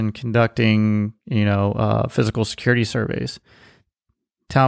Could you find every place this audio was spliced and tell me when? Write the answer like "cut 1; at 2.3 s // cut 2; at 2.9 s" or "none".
none